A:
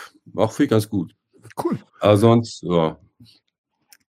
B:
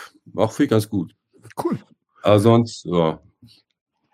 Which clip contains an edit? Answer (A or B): A